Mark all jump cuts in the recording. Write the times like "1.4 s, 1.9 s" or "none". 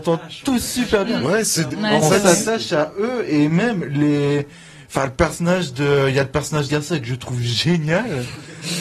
6.7 s